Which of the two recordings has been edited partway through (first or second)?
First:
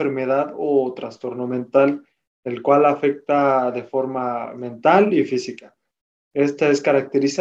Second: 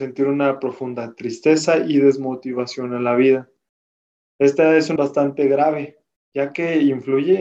second